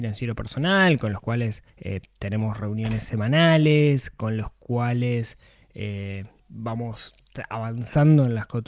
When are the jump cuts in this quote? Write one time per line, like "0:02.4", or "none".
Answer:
0:01.7
0:06.4